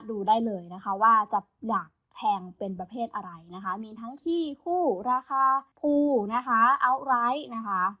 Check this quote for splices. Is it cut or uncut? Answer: cut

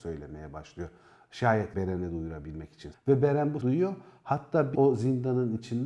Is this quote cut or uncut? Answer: cut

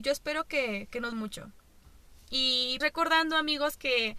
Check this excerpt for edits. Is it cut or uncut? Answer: cut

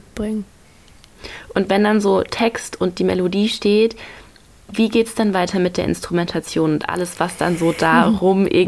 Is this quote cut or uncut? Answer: uncut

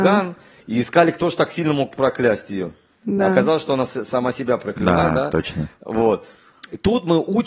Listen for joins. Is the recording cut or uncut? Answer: uncut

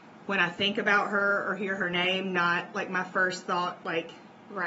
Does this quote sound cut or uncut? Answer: uncut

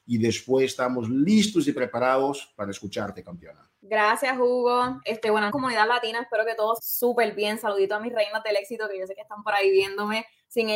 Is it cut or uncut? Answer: cut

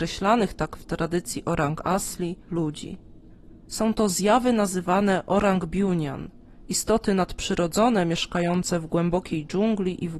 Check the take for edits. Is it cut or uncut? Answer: cut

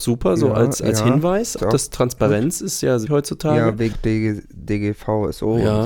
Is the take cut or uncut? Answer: cut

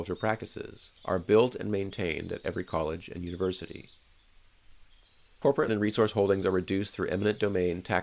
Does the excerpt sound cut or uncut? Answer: cut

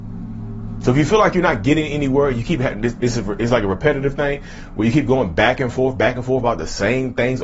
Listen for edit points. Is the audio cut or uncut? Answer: uncut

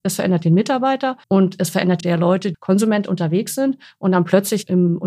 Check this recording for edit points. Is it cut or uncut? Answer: cut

